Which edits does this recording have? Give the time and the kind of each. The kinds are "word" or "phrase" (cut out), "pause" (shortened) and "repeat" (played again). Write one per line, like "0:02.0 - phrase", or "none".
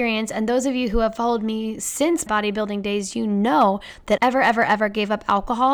0:02.3 - word
0:04.2 - phrase